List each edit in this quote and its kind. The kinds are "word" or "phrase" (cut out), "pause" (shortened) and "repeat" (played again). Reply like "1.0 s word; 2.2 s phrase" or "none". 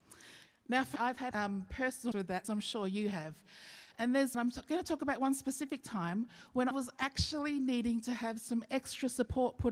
1.0 s word; 1.3 s phrase; 2.1 s word; 2.4 s word; 4.3 s phrase; 6.7 s word